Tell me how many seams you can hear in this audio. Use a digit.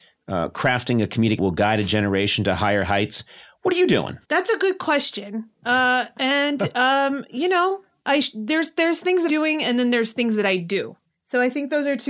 4